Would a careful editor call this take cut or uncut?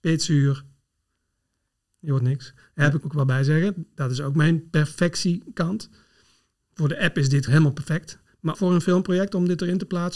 cut